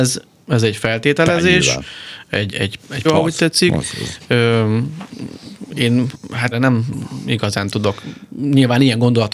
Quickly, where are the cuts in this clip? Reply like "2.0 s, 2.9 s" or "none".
2.5 s, 3.0 s, 6.5 s